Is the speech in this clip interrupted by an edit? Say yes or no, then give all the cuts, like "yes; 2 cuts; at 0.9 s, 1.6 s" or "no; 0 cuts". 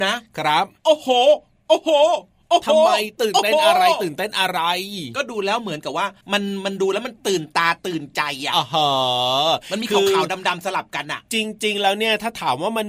yes; 1 cut; at 6.2 s